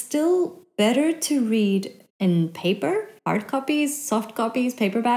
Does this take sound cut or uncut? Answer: cut